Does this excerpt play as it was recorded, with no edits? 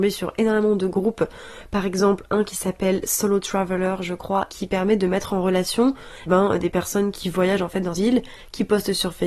no; 4 cuts; at 4.5 s, 6.3 s, 7.1 s, 7.9 s

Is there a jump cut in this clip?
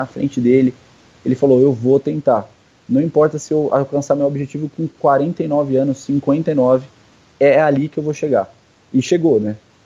no; 0 cuts

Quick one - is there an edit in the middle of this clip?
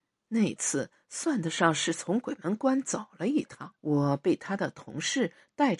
yes; 1 cut; at 3.8 s

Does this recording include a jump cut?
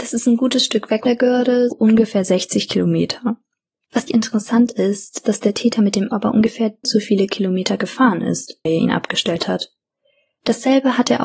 yes; 7 cuts; at 1.1 s, 1.7 s, 4.1 s, 5.2 s, 6.1 s, 6.8 s, 8.7 s

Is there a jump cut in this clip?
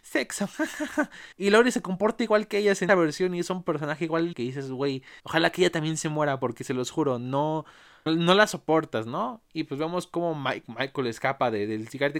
yes; 5 cuts; at 1.3 s, 2.9 s, 4.3 s, 5.2 s, 8.1 s

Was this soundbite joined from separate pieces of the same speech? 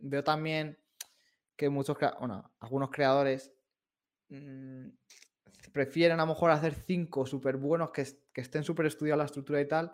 no; 0 cuts

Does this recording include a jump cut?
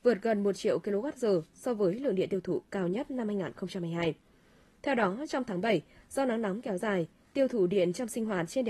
no; 0 cuts

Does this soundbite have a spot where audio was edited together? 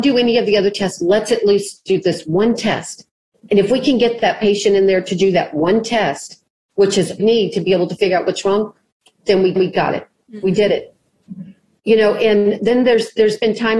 yes; 2 cuts; at 7.2 s, 9.6 s

